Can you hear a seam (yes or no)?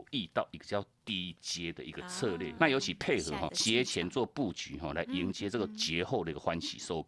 yes